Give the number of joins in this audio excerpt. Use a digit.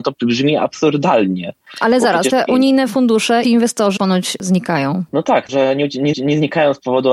6